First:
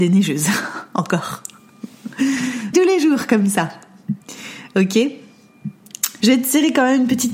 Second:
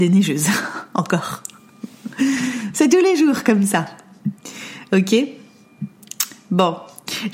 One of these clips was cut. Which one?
first; 2 cuts; at 2.7 s, 6.2 s

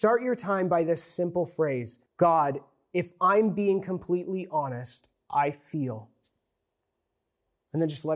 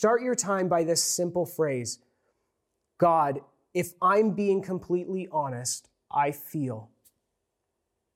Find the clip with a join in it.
first; 1 cut; at 2.1 s

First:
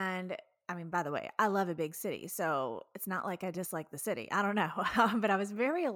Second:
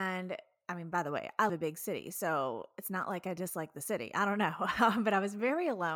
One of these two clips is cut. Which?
second; 1 cut; at 1.5 s

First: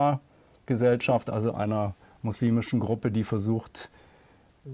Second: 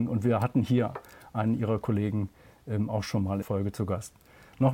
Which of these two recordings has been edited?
second; 1 cut; at 3.4 s

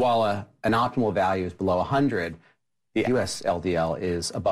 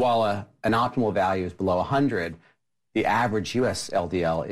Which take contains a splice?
first; 1 cut; at 3.0 s

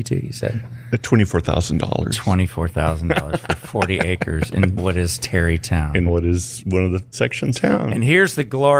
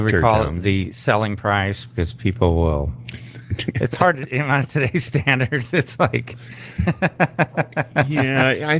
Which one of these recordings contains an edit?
first; 4 cuts; at 4.8 s, 6.1 s, 7.1 s, 7.5 s

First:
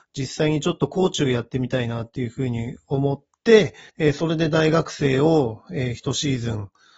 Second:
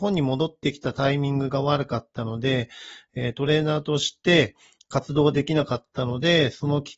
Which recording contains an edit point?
first; 1 cut; at 3.9 s

